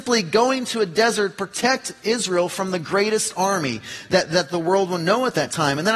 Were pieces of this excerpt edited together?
no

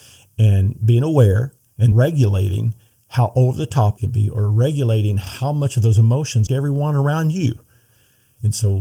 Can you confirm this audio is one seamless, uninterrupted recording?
no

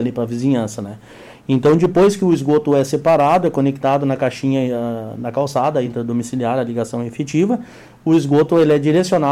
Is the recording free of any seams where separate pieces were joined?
yes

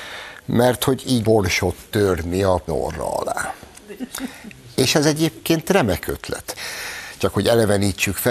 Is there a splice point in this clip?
yes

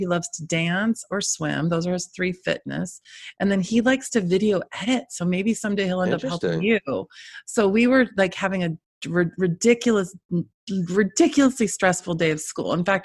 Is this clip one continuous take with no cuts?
yes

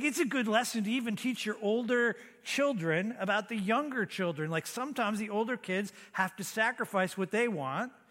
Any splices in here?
no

